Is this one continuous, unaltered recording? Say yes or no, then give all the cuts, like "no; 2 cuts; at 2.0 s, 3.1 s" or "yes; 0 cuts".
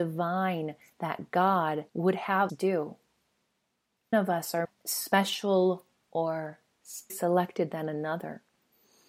no; 5 cuts; at 1.9 s, 2.5 s, 4.1 s, 4.6 s, 7.1 s